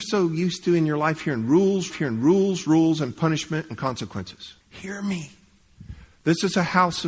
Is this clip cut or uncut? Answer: cut